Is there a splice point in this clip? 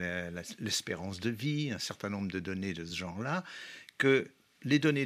no; 0 cuts

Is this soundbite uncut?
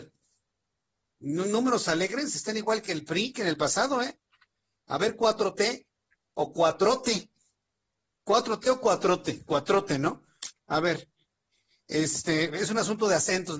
yes; 0 cuts

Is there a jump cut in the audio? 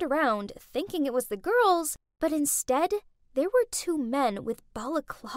no; 0 cuts

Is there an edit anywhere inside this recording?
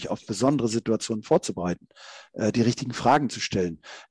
no; 0 cuts

